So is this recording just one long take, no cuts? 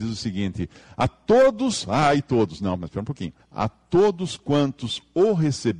no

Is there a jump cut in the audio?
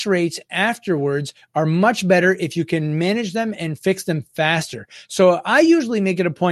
no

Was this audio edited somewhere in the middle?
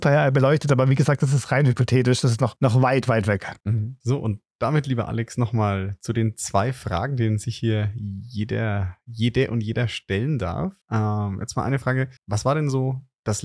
yes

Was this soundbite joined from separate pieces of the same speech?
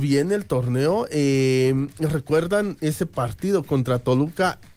no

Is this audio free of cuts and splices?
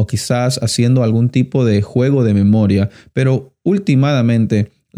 yes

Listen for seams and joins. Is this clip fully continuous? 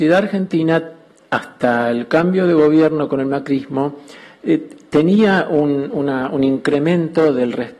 yes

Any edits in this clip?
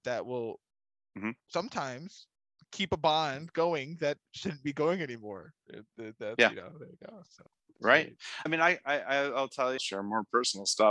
yes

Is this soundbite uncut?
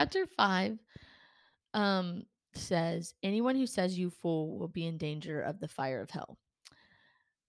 yes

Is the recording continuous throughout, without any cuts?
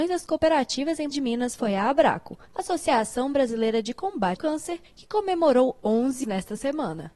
no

